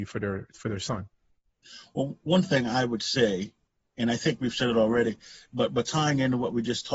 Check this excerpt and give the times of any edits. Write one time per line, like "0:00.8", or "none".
none